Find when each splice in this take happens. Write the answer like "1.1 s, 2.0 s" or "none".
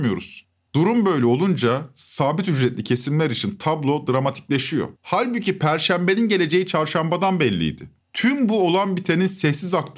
5.0 s, 8.0 s

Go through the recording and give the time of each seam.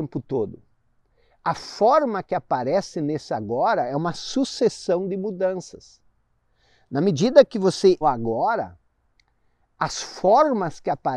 8.0 s

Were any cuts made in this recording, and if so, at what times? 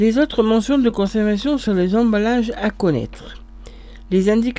none

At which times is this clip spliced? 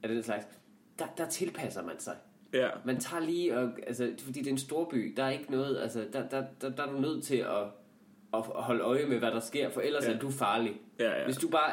none

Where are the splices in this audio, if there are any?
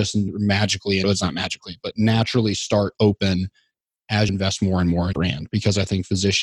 1.0 s, 2.9 s, 4.3 s, 5.1 s

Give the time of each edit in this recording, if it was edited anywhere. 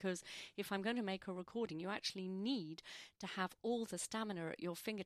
none

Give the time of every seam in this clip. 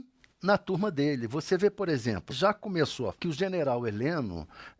2.3 s, 3.1 s

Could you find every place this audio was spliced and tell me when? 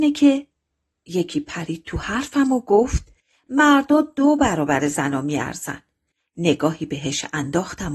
none

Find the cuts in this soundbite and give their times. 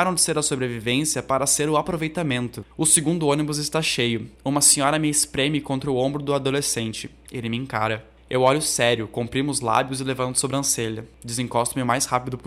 2.7 s, 4.3 s

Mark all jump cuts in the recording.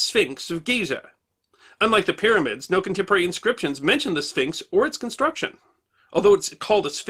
none

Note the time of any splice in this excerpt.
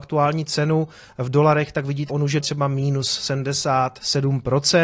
2.1 s, 2.4 s

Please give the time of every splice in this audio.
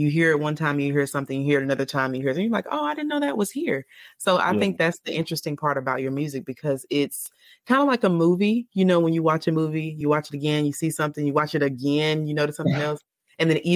none

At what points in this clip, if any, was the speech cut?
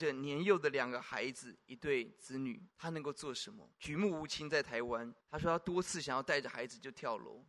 2.7 s, 3.7 s, 5.2 s

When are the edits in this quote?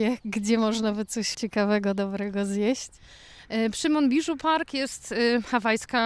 1.3 s

